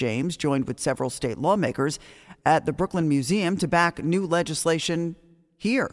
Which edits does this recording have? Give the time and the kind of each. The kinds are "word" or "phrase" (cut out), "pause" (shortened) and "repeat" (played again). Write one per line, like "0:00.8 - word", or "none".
none

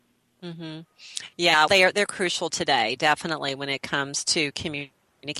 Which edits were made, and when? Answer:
0:01.7 - word

